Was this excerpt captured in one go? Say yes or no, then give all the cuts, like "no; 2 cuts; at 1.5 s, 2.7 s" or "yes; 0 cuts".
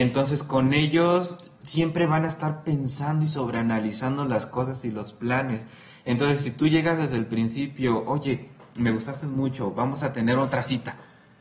yes; 0 cuts